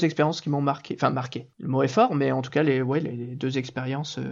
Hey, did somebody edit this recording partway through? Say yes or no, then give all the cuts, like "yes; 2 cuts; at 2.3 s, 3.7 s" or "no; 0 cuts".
no; 0 cuts